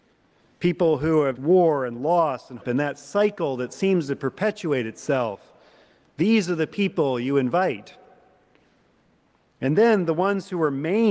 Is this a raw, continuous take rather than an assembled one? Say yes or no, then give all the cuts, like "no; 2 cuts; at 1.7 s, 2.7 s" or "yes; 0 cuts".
no; 2 cuts; at 1.4 s, 2.6 s